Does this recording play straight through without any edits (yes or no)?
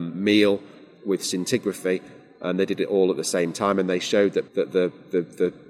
no